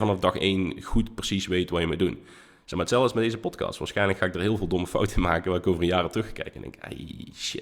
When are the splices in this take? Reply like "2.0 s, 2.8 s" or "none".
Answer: none